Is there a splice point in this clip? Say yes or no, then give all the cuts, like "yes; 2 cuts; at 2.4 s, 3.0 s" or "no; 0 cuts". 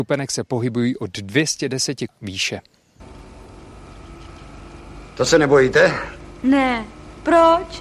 yes; 1 cut; at 2.1 s